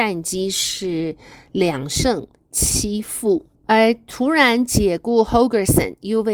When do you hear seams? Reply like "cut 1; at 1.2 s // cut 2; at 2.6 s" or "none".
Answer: none